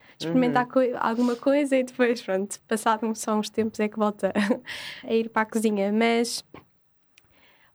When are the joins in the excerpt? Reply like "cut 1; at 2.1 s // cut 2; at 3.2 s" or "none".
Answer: cut 1; at 5.0 s